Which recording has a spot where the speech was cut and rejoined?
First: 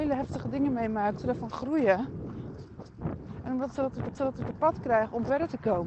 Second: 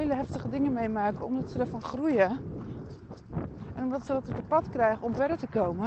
first; 2 cuts; at 1.2 s, 4.1 s

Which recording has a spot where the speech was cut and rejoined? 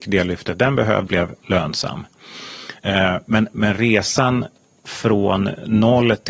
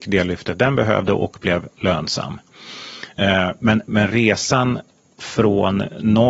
first; 1 cut; at 1.1 s

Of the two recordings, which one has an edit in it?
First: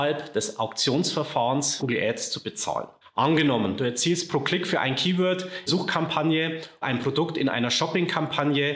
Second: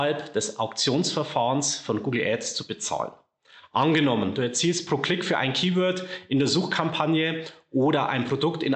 first; 4 cuts; at 1.8 s, 3.0 s, 5.7 s, 6.8 s

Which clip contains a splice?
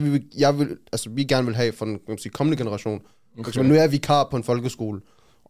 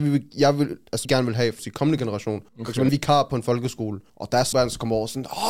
second; 6 cuts; at 1.0 s, 1.6 s, 2.5 s, 2.9 s, 4.1 s, 4.5 s

